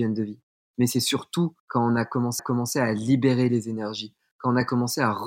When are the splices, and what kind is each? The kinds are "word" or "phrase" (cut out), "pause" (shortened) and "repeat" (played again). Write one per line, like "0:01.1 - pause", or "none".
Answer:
0:01.6 - pause
0:02.4 - repeat